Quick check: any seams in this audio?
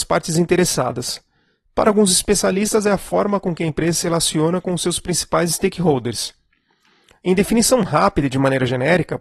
no; 0 cuts

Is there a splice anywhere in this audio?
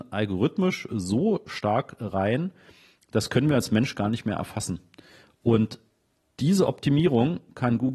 no; 0 cuts

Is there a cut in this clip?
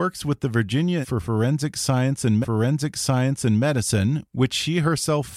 yes; 2 cuts; at 1.0 s, 2.4 s

